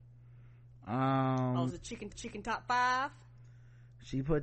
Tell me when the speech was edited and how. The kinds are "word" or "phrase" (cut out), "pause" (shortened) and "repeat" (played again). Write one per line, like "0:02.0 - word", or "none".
0:01.7 - word
0:02.1 - repeat